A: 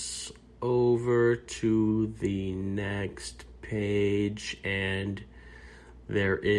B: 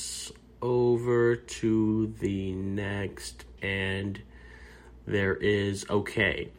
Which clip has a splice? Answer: B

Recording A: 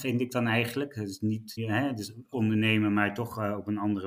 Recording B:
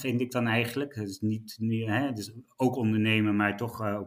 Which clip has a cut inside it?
A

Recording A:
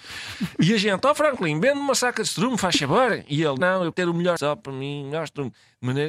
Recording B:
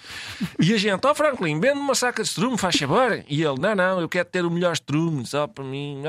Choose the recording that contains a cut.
A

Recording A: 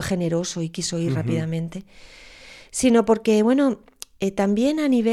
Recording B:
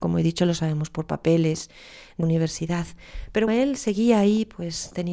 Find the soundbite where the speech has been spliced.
B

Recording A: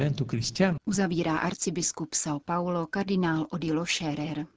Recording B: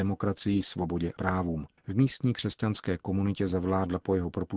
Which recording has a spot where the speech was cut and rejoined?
B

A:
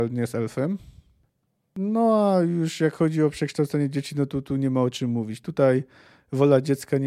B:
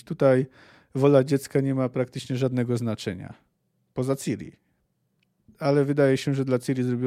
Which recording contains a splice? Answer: A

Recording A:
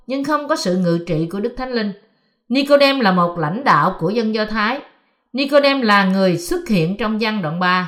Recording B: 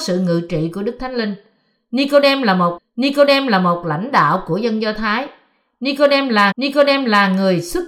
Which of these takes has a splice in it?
B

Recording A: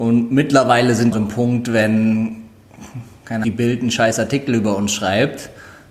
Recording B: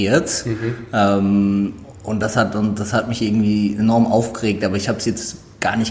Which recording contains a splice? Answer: A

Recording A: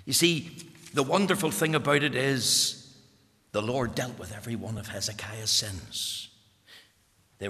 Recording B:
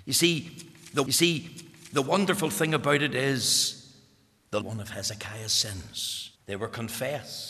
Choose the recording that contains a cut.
B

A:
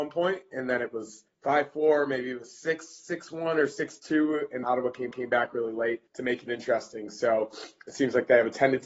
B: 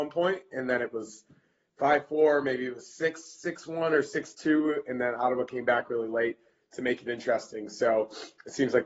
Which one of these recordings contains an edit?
A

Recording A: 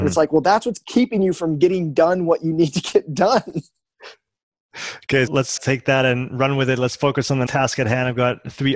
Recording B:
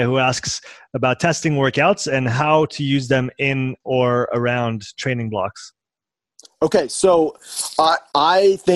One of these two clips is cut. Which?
A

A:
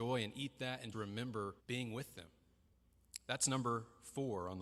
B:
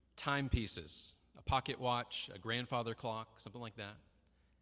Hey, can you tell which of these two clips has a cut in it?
A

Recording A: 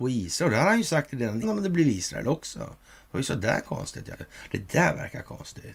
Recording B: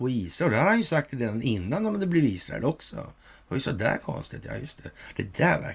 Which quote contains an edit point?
A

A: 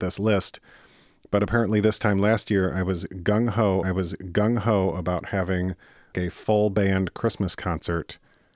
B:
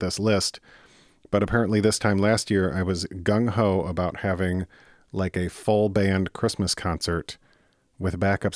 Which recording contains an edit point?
A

